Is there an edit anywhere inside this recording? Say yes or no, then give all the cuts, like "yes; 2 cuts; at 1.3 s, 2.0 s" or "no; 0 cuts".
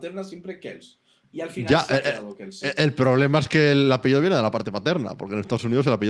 no; 0 cuts